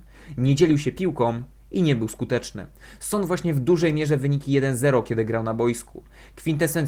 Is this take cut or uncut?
uncut